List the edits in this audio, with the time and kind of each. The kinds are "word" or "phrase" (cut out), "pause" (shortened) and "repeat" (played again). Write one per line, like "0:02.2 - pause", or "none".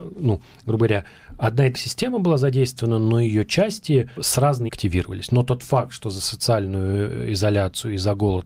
0:01.7 - word
0:04.2 - word
0:04.7 - word